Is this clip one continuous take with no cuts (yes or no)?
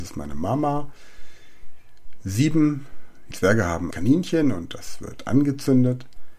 no